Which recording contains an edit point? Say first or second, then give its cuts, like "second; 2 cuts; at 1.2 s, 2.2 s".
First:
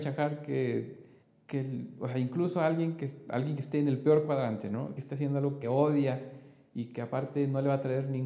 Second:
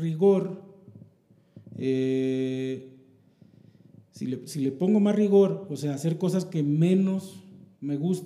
first; 3 cuts; at 1.2 s, 5.0 s, 5.6 s